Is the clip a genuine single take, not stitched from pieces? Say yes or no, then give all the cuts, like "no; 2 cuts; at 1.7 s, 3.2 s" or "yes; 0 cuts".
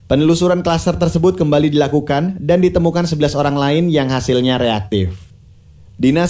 yes; 0 cuts